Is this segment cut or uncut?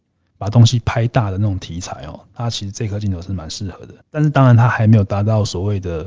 cut